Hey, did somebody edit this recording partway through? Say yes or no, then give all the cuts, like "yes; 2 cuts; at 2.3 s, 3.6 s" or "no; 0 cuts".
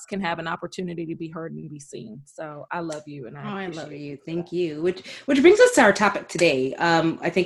no; 0 cuts